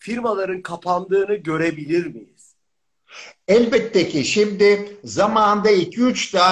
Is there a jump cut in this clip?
no; 0 cuts

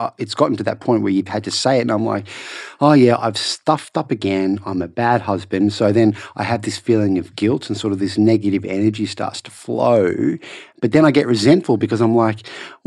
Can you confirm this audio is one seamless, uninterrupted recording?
yes; 0 cuts

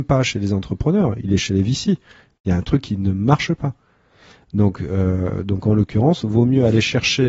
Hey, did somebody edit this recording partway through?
no; 0 cuts

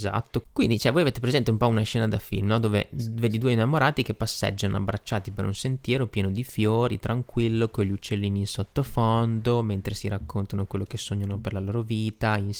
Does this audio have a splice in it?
no; 0 cuts

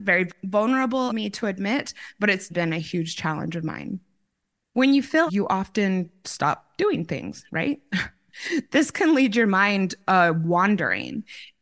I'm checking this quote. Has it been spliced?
yes; 3 cuts; at 1.1 s, 2.5 s, 5.3 s

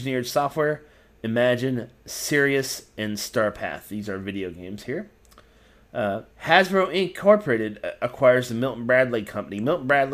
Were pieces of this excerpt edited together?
yes; 1 cut; at 6.3 s

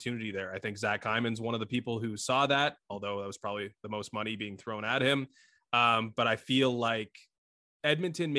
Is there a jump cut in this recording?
no; 0 cuts

